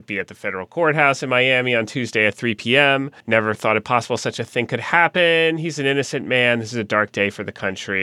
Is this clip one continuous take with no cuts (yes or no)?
no